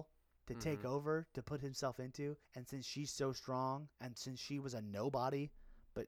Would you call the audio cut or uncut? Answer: cut